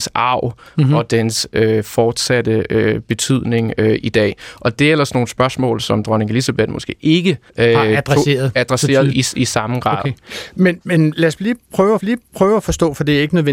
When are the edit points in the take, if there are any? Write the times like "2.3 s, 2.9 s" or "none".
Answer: 7.5 s, 9.1 s, 10.8 s, 12.0 s